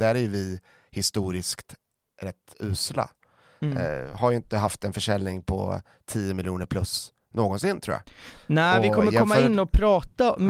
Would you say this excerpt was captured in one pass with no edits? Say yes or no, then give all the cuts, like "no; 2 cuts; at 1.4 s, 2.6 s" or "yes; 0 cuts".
yes; 0 cuts